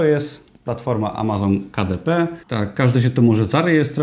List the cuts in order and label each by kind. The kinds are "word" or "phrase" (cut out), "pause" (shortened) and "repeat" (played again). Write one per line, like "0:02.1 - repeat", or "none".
0:02.4 - pause